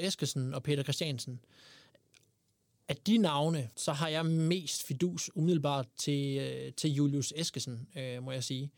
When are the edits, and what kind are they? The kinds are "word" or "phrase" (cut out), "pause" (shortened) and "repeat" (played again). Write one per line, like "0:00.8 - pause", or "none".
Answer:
0:03.7 - pause